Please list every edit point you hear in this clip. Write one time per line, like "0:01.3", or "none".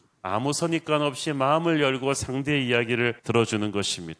0:03.2